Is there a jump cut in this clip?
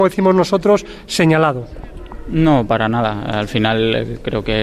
no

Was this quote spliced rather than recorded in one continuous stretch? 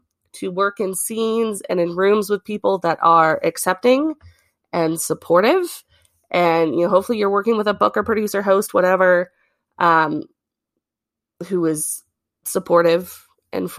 no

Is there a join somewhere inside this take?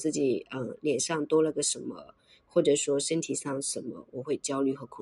no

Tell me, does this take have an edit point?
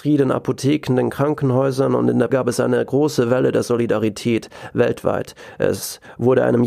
yes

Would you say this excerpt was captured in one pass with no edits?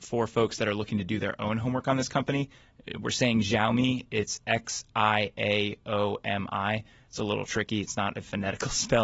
yes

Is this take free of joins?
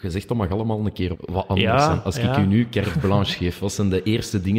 no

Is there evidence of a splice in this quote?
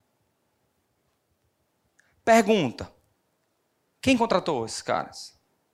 no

